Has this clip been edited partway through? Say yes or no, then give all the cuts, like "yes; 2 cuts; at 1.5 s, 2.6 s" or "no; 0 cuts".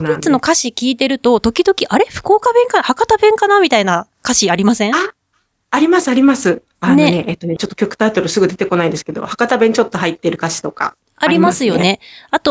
yes; 1 cut; at 7.6 s